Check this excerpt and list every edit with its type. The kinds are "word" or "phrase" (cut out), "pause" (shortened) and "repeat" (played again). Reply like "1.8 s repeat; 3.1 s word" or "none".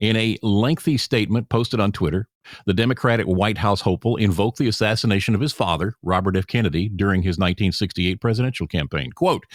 none